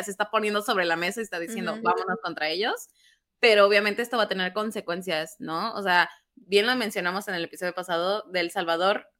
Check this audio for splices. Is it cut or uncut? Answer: uncut